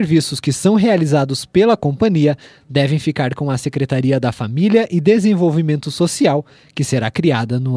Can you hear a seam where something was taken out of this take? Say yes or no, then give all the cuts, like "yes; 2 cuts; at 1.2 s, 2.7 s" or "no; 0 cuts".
no; 0 cuts